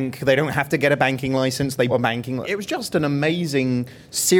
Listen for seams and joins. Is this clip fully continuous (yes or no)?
no